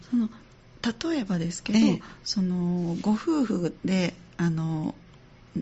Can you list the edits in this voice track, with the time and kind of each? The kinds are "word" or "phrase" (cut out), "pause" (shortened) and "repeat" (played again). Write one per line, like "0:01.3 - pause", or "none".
0:03.8 - pause